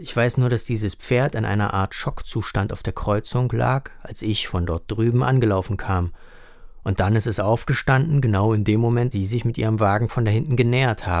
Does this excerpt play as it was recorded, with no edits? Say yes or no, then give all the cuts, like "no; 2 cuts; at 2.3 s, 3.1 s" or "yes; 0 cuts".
no; 1 cut; at 9.1 s